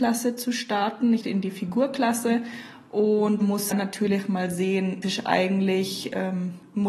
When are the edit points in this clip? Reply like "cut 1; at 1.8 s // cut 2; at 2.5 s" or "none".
cut 1; at 1.2 s // cut 2; at 3.4 s // cut 3; at 3.7 s // cut 4; at 5.0 s